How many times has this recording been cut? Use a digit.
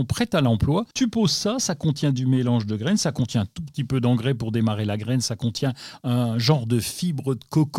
1